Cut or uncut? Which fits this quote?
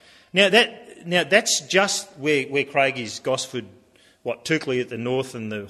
uncut